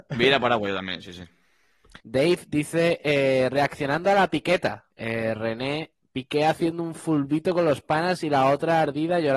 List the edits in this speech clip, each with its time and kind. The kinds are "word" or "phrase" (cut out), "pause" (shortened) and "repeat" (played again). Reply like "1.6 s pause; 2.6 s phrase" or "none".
2.0 s pause; 4.9 s pause